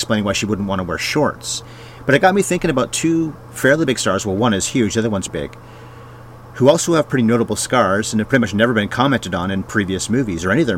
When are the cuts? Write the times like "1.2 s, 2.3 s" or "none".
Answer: 5.3 s